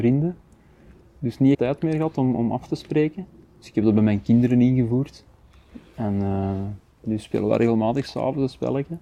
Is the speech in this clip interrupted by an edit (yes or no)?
yes